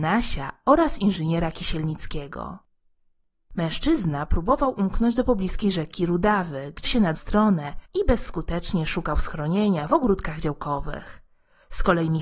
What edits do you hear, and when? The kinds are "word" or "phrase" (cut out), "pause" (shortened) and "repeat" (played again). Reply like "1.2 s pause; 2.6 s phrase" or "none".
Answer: 6.8 s word; 7.1 s word; 7.9 s pause